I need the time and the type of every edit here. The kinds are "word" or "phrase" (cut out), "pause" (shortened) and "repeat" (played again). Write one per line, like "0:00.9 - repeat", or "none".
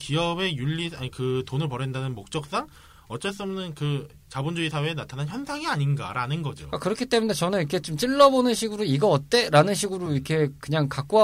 none